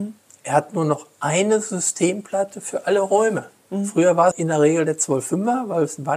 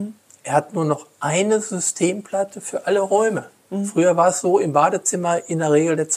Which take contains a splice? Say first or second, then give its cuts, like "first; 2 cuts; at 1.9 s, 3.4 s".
first; 1 cut; at 4.3 s